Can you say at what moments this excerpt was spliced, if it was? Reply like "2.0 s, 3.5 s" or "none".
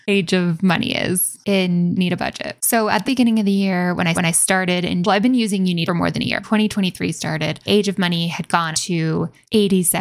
2.0 s, 3.0 s, 4.1 s, 5.0 s, 5.9 s, 6.4 s, 7.7 s, 8.7 s